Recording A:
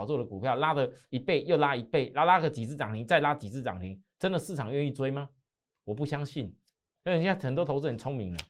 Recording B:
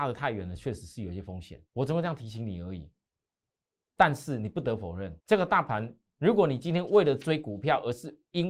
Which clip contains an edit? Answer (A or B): B